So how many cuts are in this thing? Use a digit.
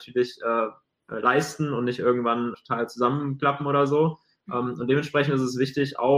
1